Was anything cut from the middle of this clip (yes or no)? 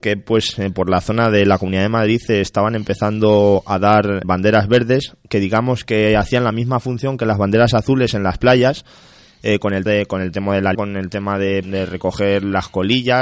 yes